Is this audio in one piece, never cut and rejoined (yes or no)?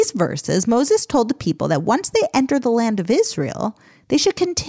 yes